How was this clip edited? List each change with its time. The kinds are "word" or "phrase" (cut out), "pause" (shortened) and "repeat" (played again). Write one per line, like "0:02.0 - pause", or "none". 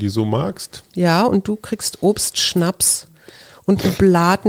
none